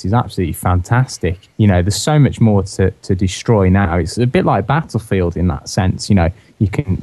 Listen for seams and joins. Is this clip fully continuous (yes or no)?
no